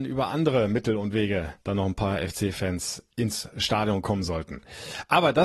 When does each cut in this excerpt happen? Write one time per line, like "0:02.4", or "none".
0:01.6